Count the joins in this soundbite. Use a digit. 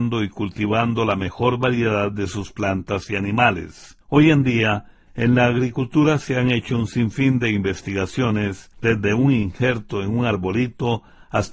2